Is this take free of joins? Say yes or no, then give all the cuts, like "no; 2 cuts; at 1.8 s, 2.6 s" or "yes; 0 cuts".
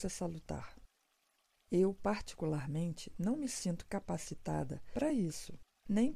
yes; 0 cuts